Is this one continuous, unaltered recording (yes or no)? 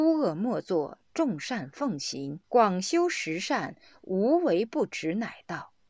no